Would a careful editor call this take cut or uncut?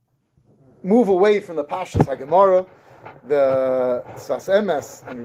uncut